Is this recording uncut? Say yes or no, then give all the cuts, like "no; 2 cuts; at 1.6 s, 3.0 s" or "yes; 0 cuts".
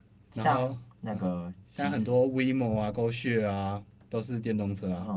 no; 2 cuts; at 0.9 s, 1.7 s